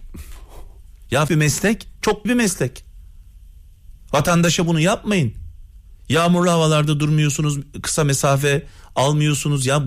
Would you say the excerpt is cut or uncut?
cut